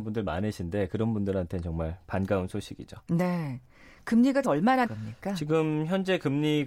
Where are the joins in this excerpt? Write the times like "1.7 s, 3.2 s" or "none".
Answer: 4.4 s, 4.8 s